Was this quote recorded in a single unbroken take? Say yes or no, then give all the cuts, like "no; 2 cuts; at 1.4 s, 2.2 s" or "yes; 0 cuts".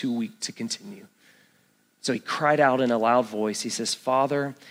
yes; 0 cuts